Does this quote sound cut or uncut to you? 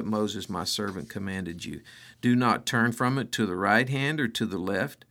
uncut